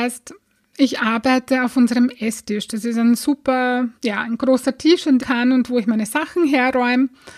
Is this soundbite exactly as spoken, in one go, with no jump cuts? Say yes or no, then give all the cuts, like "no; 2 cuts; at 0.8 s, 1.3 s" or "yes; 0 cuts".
no; 2 cuts; at 4.0 s, 5.2 s